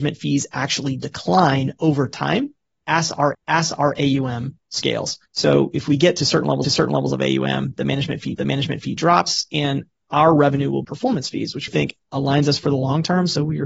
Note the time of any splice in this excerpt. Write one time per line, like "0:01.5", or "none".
0:03.3
0:05.3
0:06.6
0:08.3
0:10.8
0:11.7

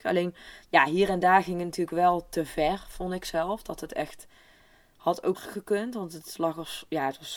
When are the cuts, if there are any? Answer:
0:05.3

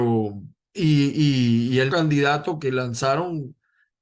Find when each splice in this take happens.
0:01.9
0:02.6

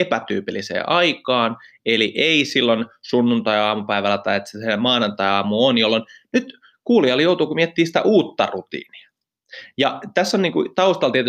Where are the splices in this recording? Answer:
none

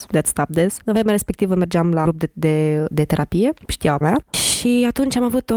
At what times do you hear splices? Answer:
0:02.0
0:02.9
0:03.6
0:04.0

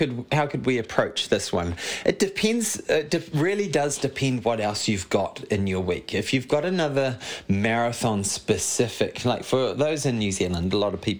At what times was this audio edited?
none

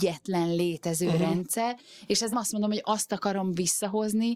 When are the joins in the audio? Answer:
0:02.3

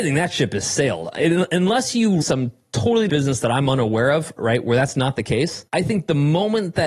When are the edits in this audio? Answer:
0:02.2
0:03.1
0:05.7

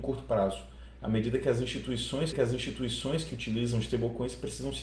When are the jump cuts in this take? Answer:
0:02.3

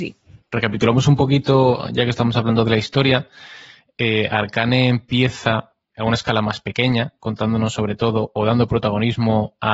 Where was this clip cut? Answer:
none

